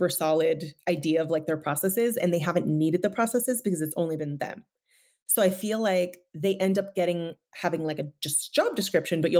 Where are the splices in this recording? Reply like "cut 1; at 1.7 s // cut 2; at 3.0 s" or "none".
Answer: none